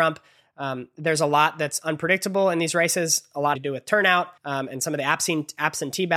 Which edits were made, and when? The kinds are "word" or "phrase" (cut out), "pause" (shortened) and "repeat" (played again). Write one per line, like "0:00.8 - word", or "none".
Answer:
0:03.5 - word
0:04.4 - pause